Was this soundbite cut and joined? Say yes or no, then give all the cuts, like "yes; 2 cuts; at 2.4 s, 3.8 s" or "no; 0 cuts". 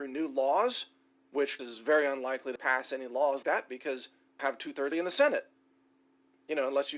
yes; 5 cuts; at 1.6 s, 2.6 s, 3.4 s, 4.4 s, 4.9 s